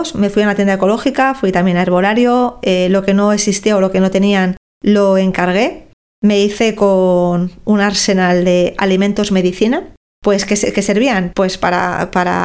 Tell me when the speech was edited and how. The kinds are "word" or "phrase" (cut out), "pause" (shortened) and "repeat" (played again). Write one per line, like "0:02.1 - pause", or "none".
none